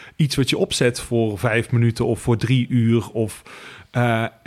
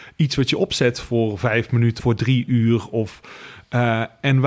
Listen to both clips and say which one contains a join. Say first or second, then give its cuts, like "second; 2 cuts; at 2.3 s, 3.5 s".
second; 1 cut; at 2.0 s